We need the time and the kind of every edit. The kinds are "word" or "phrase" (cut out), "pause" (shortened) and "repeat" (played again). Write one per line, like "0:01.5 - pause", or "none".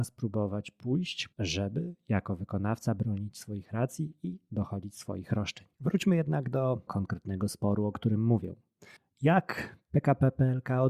0:01.3 - pause
0:05.7 - pause
0:06.9 - word
0:09.0 - pause